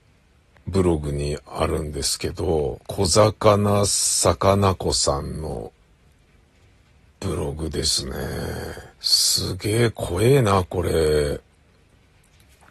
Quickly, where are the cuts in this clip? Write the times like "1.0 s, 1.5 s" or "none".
2.8 s, 8.9 s